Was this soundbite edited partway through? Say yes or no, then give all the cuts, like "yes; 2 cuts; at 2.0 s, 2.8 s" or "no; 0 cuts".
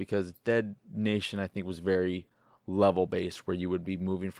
no; 0 cuts